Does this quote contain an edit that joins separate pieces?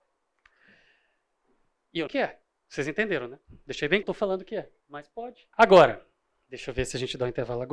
yes; 5 cuts; at 2.1 s, 3.4 s, 4.0 s, 4.8 s, 5.5 s

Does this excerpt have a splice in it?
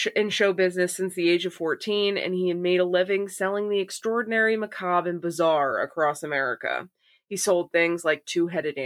no; 0 cuts

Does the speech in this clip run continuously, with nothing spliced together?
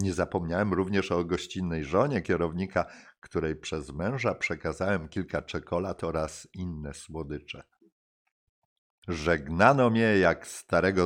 yes; 0 cuts

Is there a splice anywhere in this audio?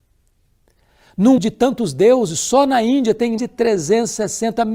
yes; 2 cuts; at 1.4 s, 3.4 s

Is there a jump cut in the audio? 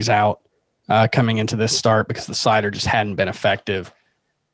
no; 0 cuts

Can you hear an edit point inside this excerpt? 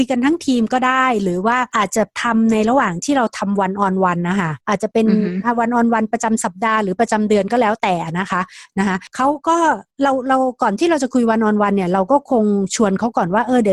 yes; 2 cuts; at 4.6 s, 9.9 s

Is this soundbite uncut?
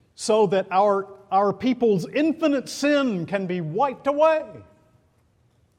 yes; 0 cuts

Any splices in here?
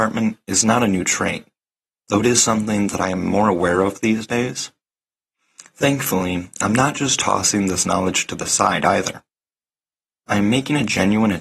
no; 0 cuts

